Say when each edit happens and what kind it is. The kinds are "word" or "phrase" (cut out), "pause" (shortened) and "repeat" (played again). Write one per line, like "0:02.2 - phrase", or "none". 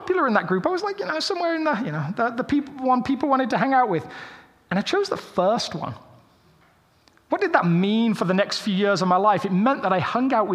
none